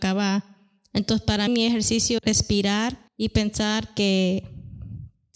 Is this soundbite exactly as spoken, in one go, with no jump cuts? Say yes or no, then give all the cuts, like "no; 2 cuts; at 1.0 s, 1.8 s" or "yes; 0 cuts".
no; 3 cuts; at 1.5 s, 2.2 s, 3.1 s